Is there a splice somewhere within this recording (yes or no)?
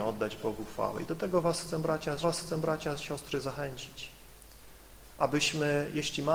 yes